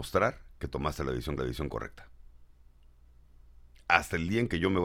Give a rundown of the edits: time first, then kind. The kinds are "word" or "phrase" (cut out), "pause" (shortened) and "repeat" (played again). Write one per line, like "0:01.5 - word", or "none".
0:01.4 - repeat